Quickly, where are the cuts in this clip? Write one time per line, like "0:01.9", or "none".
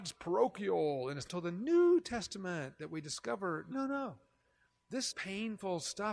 0:01.3
0:03.7
0:05.1